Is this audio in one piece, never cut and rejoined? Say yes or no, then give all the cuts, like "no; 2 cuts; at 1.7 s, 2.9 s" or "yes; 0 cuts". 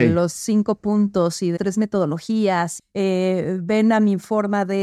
no; 2 cuts; at 1.6 s, 2.8 s